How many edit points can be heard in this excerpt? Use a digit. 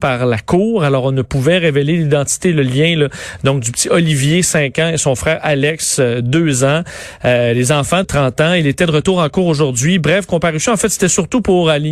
1